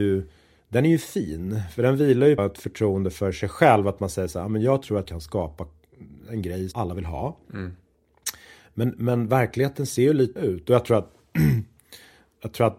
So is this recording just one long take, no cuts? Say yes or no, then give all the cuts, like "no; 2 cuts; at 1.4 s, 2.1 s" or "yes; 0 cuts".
no; 4 cuts; at 2.4 s, 5.0 s, 6.7 s, 10.4 s